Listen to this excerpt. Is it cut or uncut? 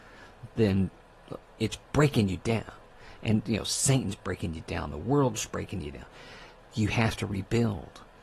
uncut